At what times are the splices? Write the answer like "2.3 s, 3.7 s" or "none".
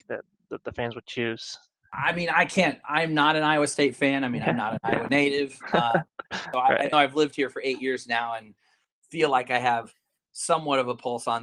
6.9 s